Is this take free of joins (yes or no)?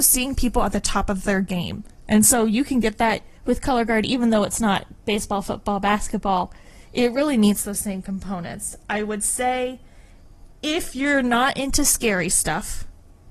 no